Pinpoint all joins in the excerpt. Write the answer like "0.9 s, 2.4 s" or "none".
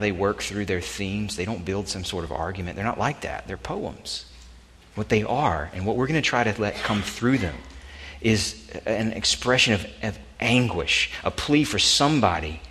none